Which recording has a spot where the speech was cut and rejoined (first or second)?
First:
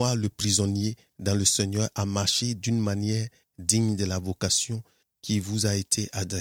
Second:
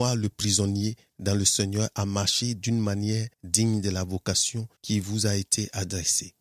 second